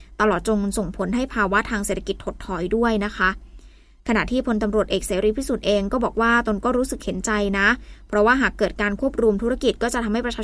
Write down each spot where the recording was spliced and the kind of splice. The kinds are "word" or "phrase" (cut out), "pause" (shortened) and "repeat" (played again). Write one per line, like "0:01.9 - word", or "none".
none